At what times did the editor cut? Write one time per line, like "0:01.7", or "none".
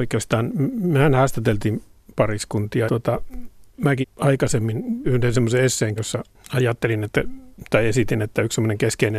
0:02.9
0:04.0
0:05.0
0:06.0